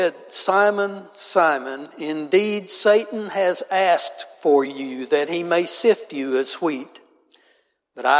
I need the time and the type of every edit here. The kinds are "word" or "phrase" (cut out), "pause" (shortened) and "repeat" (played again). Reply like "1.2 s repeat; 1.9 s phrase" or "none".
none